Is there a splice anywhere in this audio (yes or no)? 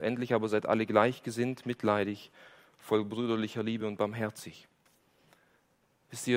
no